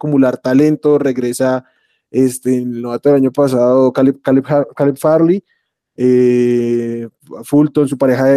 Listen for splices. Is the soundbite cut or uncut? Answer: uncut